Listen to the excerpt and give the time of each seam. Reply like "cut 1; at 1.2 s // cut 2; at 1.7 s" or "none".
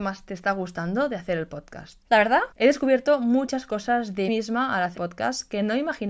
cut 1; at 2.5 s // cut 2; at 4.3 s // cut 3; at 5.0 s